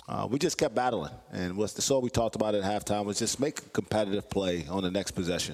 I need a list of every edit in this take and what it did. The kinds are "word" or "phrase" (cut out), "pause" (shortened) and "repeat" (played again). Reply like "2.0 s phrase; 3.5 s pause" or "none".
none